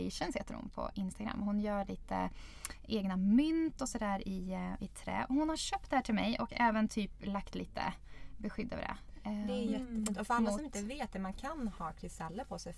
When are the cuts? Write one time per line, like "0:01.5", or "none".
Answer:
none